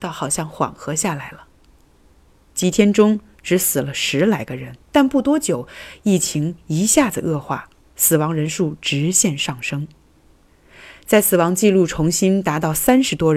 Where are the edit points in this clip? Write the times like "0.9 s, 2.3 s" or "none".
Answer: 4.8 s